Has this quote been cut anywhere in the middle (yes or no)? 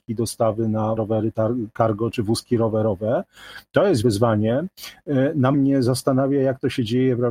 yes